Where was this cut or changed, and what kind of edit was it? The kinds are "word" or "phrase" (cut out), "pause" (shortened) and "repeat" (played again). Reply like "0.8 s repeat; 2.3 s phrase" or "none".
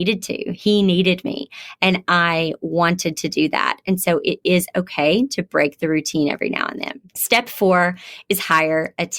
7.1 s pause